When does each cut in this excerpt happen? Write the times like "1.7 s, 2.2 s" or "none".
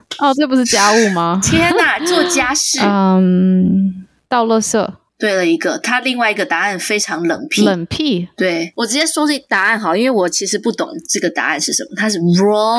5.1 s